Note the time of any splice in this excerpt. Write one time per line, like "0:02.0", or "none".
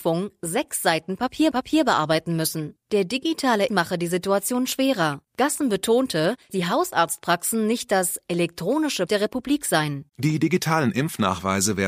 0:01.5
0:02.8
0:03.7
0:05.3
0:06.5
0:09.1
0:10.1